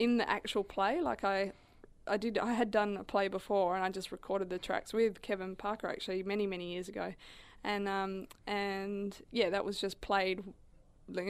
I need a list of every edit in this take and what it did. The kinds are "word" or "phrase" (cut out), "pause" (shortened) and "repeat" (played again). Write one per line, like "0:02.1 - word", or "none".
none

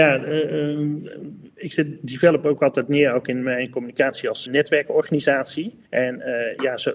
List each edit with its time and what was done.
0:04.5 - word
0:05.8 - pause

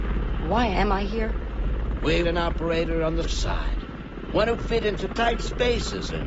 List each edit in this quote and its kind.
0:02.2 - word
0:03.2 - word
0:04.6 - word

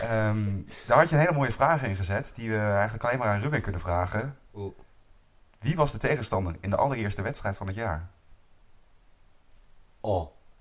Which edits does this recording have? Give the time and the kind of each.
none

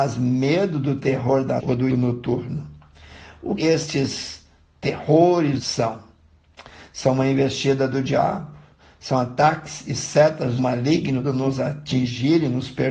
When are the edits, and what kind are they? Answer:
0:01.6 - word
0:01.9 - word
0:03.6 - word
0:05.6 - word
0:10.6 - word
0:11.2 - word

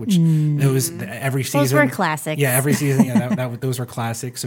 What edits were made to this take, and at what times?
none

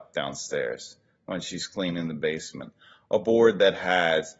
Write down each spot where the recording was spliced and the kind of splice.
none

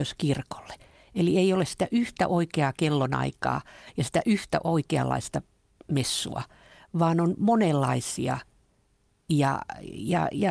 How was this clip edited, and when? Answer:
none

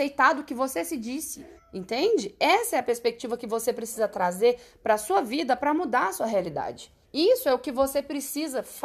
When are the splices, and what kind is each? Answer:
0:01.6 - pause
0:07.0 - pause

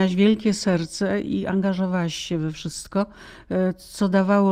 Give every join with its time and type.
none

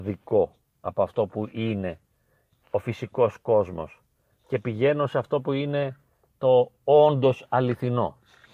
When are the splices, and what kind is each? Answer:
none

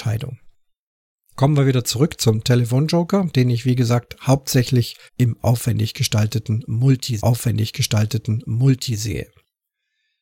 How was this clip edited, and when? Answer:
0:05.1 - pause
0:07.2 - repeat

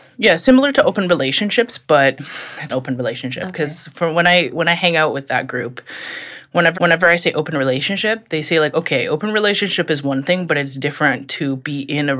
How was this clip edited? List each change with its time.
0:02.7 - phrase
0:06.7 - repeat

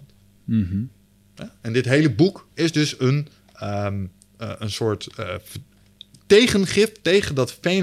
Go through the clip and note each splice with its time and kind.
none

